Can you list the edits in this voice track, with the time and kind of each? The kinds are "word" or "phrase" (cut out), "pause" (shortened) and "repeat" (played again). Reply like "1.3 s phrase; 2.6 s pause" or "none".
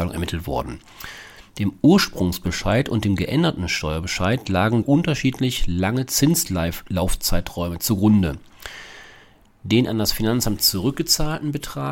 4.8 s word